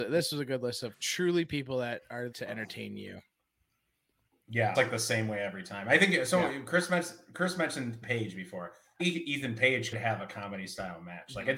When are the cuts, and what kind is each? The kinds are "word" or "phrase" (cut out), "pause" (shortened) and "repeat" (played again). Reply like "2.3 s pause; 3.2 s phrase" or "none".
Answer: 0.9 s word; 2.3 s word; 4.7 s word; 8.0 s word; 9.0 s word; 9.9 s word